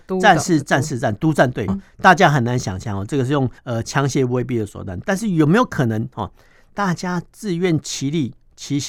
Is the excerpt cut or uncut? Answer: cut